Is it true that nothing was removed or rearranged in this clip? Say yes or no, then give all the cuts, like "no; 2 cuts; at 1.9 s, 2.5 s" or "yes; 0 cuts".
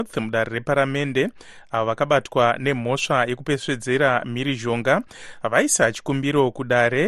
yes; 0 cuts